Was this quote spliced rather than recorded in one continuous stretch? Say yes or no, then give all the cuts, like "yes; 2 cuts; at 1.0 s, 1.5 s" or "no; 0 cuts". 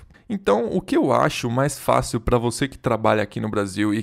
no; 0 cuts